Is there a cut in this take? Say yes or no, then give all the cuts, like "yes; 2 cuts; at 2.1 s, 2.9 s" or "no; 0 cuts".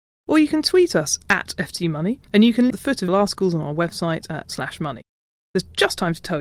yes; 4 cuts; at 2.3 s, 2.7 s, 3.1 s, 4.5 s